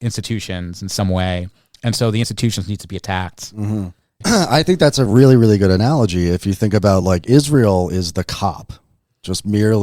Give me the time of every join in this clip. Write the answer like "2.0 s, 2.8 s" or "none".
none